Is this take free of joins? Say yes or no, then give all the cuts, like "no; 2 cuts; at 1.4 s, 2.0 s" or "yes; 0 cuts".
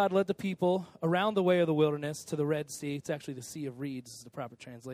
yes; 0 cuts